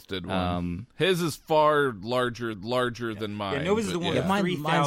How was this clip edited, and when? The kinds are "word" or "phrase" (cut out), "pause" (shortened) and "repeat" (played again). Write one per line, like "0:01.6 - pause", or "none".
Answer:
0:02.5 - repeat